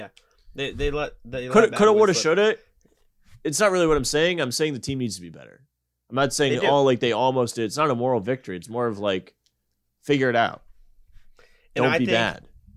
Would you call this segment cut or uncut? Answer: uncut